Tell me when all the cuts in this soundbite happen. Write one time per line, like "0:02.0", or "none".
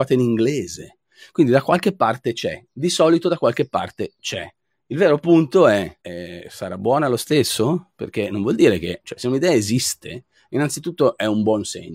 0:06.0